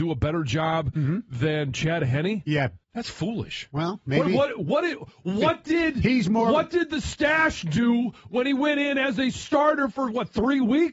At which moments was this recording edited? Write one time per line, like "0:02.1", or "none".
0:02.8